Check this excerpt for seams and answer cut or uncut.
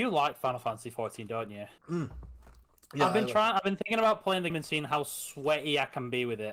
cut